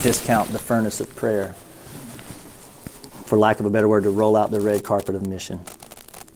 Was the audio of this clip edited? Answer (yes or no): no